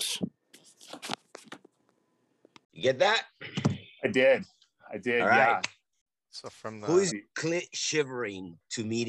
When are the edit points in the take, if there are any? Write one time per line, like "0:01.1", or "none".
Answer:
0:07.1